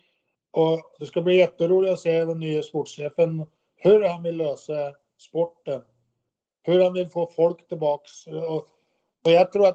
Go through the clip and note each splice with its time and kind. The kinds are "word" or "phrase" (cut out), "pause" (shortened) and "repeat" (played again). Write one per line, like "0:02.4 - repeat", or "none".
none